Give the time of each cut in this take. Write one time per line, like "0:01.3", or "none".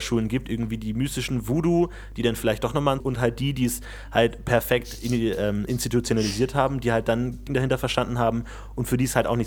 0:03.0
0:07.5